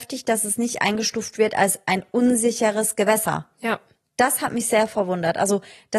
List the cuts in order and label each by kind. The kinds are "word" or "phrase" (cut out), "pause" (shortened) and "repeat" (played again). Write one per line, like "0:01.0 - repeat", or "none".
none